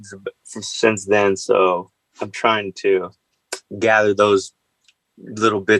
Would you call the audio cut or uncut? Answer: uncut